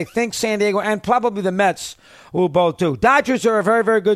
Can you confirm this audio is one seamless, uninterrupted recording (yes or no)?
yes